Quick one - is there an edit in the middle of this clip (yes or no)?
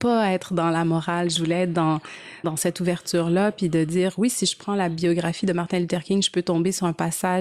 yes